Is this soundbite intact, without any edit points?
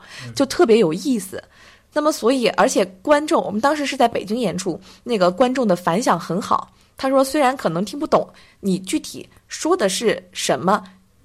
yes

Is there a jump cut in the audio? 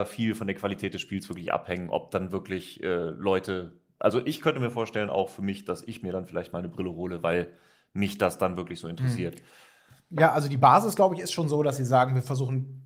no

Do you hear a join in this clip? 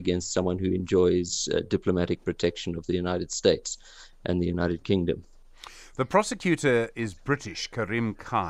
no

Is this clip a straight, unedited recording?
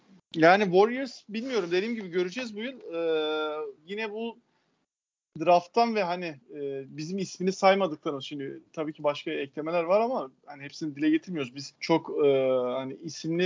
no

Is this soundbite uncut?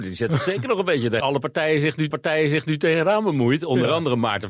no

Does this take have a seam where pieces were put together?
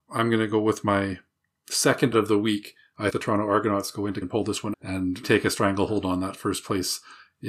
yes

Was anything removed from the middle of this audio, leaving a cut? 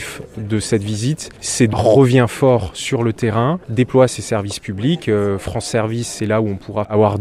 yes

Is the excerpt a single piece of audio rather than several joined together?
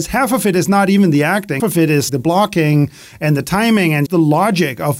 no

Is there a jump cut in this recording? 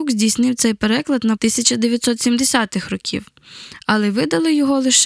yes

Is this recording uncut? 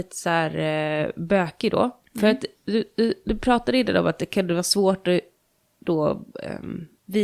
yes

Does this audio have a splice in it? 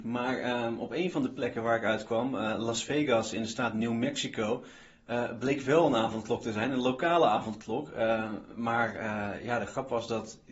no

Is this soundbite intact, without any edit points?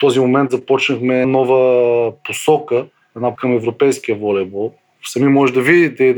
no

